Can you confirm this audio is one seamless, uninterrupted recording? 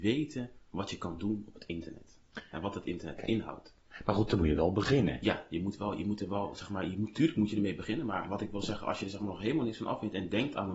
yes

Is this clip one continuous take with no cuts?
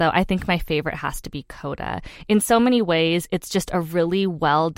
yes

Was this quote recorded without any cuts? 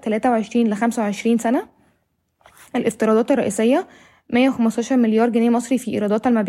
yes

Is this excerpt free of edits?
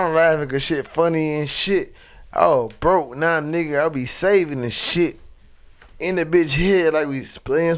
yes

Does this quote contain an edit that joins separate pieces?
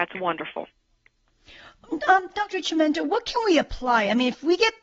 no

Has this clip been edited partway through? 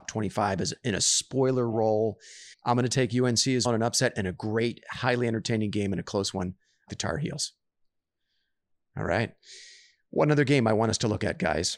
yes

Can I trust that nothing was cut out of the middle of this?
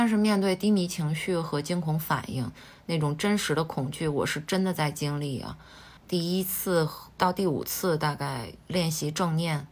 no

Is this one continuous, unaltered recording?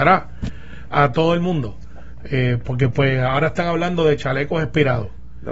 yes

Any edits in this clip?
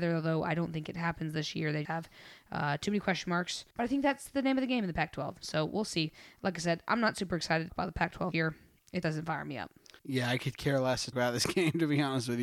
yes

